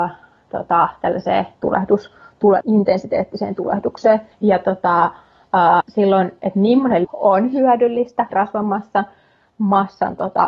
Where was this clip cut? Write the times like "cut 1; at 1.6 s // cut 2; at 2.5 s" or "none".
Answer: cut 1; at 1.5 s // cut 2; at 2.6 s // cut 3; at 4.3 s // cut 4; at 5.8 s // cut 5; at 7.0 s // cut 6; at 8.3 s